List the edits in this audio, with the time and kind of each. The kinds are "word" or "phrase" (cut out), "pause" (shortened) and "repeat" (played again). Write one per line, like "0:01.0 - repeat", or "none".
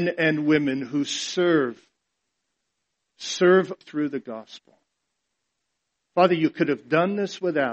0:03.8 - word